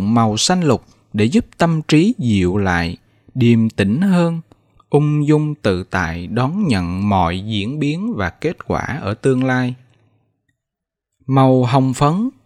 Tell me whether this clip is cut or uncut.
uncut